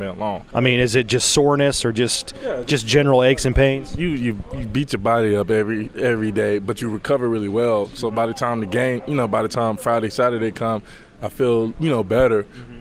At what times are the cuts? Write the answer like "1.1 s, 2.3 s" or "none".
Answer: none